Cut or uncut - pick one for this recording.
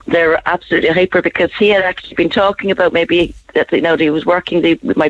uncut